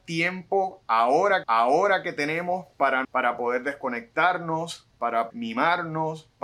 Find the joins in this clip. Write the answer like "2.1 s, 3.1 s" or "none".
1.4 s, 3.0 s, 5.3 s